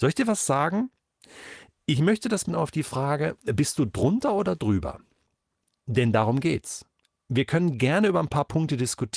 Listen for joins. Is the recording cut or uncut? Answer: cut